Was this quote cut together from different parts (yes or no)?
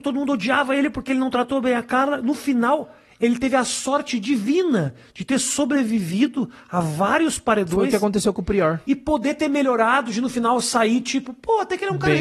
no